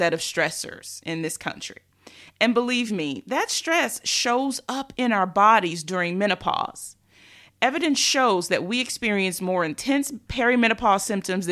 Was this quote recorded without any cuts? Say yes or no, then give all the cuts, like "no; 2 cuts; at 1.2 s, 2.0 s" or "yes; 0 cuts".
yes; 0 cuts